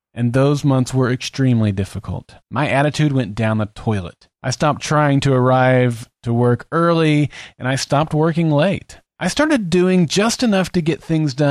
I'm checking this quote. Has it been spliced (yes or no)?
yes